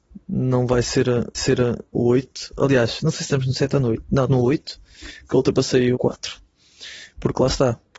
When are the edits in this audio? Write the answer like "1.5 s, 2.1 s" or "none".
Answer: 1.3 s, 4.3 s, 5.9 s